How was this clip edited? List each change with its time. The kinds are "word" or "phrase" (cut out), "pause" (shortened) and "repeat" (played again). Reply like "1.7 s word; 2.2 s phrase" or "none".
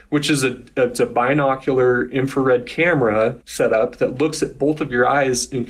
3.4 s pause